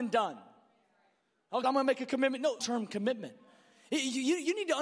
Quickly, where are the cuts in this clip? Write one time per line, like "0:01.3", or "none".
0:01.6
0:02.6